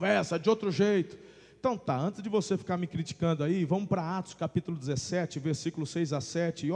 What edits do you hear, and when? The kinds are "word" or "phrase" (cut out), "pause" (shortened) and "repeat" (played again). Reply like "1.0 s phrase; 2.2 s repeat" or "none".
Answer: none